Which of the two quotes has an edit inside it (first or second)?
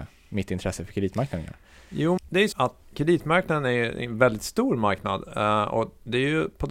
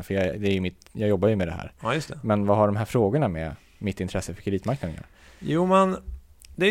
first